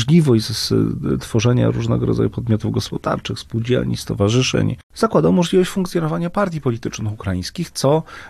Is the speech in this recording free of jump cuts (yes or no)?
no